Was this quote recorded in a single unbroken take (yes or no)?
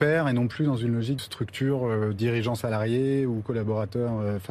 no